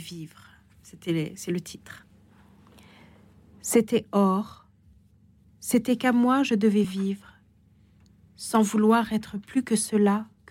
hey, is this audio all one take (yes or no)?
yes